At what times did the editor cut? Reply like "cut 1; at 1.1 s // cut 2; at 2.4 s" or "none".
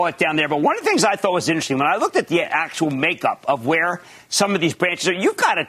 none